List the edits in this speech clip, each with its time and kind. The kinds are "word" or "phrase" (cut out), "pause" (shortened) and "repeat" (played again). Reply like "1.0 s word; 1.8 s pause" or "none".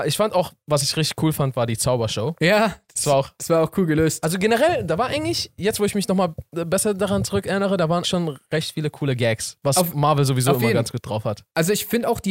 8.0 s word